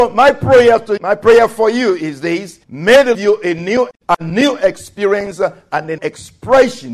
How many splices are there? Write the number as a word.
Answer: five